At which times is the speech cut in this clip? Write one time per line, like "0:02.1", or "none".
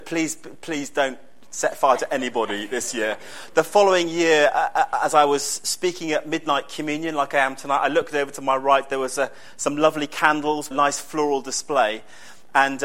0:10.7